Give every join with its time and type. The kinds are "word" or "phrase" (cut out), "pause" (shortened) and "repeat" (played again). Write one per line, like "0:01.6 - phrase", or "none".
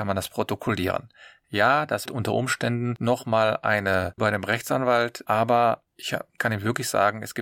0:02.1 - word
0:04.2 - word
0:05.3 - word
0:06.4 - word